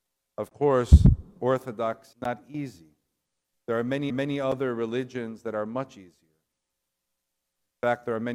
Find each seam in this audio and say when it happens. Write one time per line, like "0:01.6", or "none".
0:02.1
0:04.1